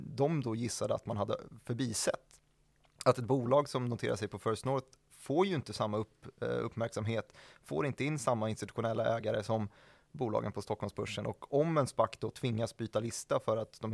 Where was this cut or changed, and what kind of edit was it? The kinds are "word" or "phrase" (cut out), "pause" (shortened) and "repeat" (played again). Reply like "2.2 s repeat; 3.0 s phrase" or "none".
none